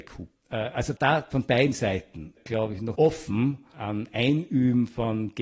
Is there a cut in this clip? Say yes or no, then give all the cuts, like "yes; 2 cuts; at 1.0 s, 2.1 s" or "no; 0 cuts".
yes; 4 cuts; at 1.0 s, 1.3 s, 2.9 s, 3.7 s